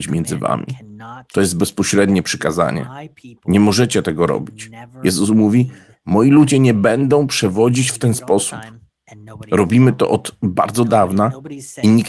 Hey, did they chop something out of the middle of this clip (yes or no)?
no